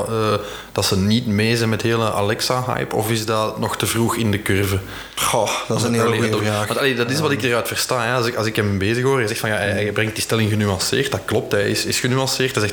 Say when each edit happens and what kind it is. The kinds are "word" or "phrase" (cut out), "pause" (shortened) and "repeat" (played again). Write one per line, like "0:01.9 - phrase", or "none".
none